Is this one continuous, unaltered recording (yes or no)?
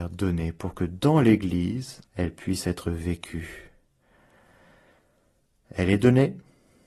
no